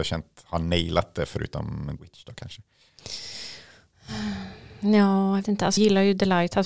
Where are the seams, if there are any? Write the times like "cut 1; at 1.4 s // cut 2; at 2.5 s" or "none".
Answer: cut 1; at 2.0 s // cut 2; at 5.4 s // cut 3; at 5.8 s